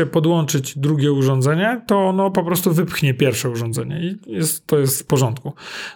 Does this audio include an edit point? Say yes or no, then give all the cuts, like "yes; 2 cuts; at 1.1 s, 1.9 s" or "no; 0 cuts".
no; 0 cuts